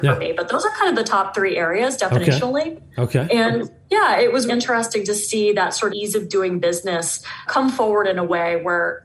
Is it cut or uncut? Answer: cut